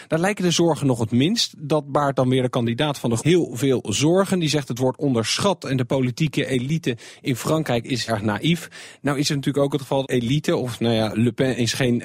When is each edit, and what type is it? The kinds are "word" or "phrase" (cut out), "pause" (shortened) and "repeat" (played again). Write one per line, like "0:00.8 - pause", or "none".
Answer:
0:03.2 - word
0:08.1 - word
0:10.0 - phrase